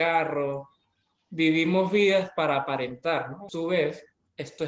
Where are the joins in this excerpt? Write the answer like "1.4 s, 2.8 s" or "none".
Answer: 3.5 s